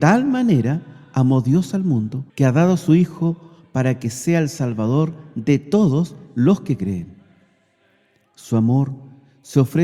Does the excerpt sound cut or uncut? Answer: cut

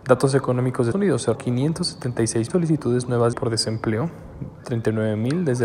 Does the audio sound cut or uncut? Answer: cut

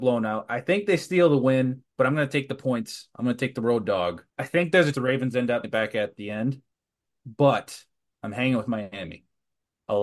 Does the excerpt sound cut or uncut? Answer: cut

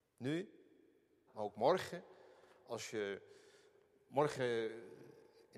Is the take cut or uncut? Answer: cut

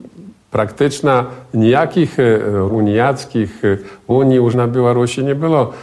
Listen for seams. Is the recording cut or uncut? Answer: cut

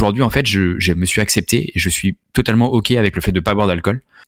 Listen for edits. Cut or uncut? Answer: uncut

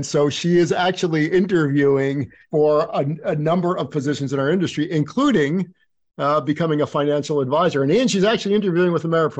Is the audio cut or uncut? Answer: uncut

